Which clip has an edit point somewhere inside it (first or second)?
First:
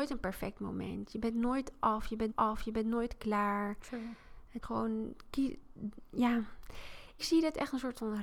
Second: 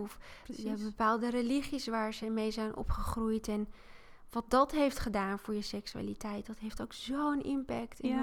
first